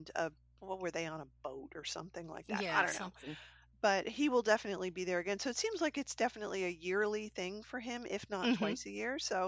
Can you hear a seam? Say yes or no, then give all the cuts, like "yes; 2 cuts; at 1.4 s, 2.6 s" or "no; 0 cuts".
no; 0 cuts